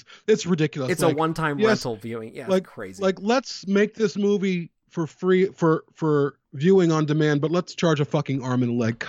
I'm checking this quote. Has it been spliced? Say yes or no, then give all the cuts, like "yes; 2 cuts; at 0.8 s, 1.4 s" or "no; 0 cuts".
yes; 1 cut; at 6.4 s